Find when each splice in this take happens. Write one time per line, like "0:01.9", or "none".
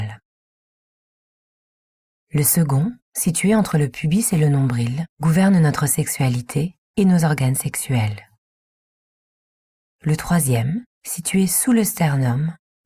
0:03.0
0:05.1
0:10.9